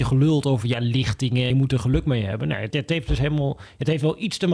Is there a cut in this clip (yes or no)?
yes